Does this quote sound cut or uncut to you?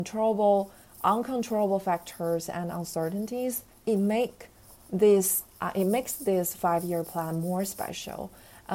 cut